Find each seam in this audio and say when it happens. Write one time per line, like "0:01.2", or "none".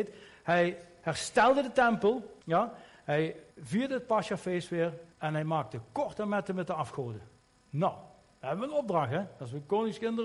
0:02.4
0:03.5
0:05.1
0:07.4